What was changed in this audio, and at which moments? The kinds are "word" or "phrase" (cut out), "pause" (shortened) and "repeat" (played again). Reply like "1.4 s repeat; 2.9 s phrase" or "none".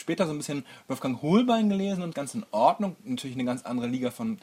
2.1 s phrase